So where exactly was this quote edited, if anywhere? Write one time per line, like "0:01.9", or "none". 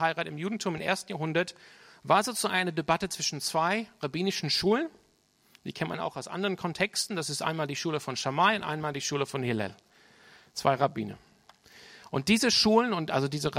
none